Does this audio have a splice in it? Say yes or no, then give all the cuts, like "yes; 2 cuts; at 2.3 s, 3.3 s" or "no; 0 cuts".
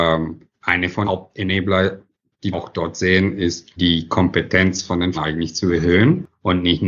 yes; 4 cuts; at 1.0 s, 2.5 s, 3.8 s, 5.1 s